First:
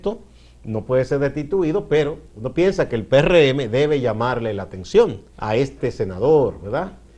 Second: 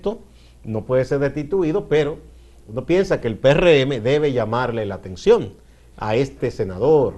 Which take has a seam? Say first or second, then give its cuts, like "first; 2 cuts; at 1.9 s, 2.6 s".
first; 2 cuts; at 2.3 s, 5.3 s